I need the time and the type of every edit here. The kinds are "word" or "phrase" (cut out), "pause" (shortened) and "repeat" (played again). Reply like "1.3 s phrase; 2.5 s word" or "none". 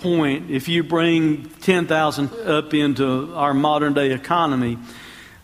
2.3 s word

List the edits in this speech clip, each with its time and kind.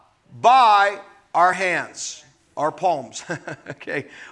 none

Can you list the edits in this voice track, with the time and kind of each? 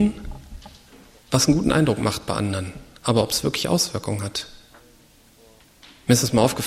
none

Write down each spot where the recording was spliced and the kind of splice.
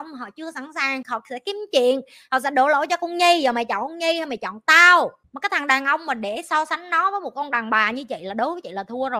none

